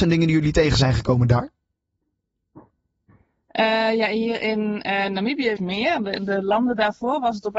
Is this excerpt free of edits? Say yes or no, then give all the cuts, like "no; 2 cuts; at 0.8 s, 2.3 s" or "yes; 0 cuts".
no; 1 cut; at 5.6 s